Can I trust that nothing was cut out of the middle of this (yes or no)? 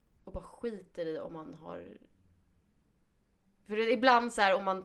yes